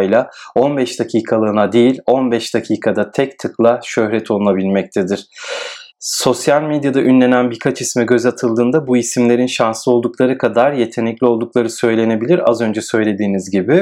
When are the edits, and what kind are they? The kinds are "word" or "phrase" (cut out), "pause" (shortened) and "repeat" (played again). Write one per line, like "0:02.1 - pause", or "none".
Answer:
0:05.9 - pause